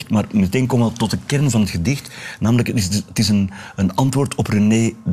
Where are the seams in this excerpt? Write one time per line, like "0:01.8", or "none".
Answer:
none